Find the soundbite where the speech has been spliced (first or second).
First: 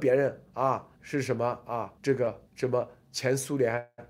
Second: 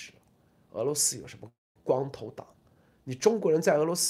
first